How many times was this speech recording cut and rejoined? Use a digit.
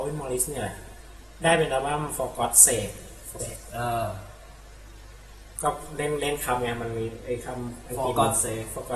1